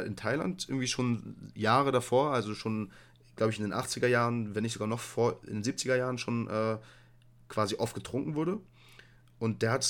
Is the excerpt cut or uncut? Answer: uncut